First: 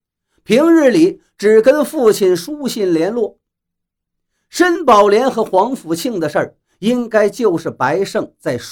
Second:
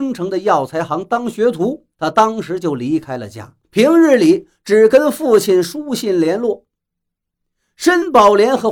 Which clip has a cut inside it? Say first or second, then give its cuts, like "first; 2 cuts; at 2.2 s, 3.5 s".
second; 2 cuts; at 1.9 s, 3.6 s